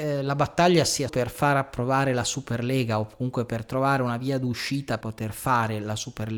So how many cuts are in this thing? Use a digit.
2